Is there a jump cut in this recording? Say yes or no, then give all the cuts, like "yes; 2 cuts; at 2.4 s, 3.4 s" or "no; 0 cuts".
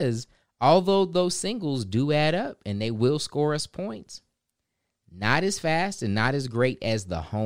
no; 0 cuts